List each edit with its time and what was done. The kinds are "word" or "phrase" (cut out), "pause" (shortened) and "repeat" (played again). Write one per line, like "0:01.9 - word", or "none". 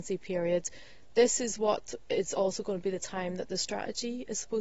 none